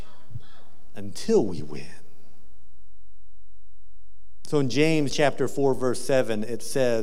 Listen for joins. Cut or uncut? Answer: uncut